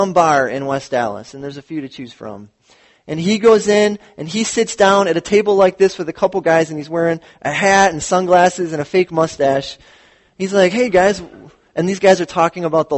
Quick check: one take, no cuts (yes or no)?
yes